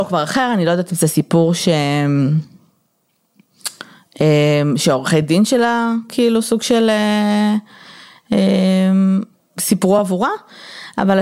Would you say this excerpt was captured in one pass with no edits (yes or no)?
yes